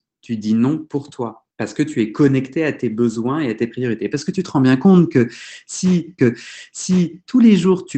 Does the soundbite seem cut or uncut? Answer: cut